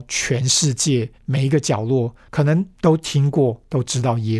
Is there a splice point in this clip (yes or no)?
yes